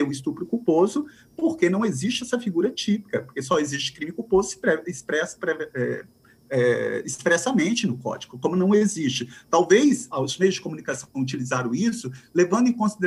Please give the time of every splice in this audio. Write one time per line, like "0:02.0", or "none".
0:10.1